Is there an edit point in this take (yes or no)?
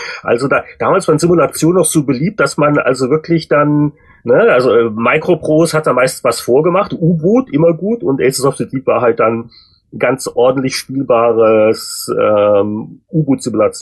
no